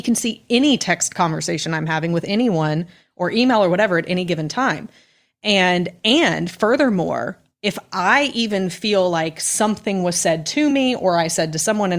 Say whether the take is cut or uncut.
uncut